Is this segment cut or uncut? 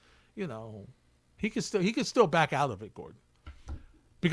uncut